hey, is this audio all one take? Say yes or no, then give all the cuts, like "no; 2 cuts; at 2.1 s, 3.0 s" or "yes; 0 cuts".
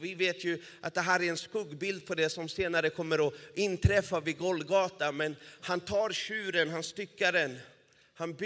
yes; 0 cuts